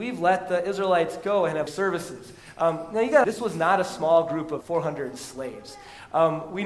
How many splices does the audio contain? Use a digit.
3